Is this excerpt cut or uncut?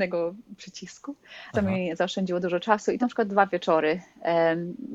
cut